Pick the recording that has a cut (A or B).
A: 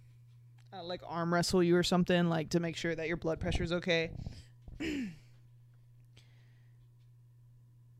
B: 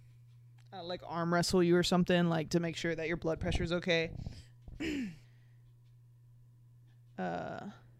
B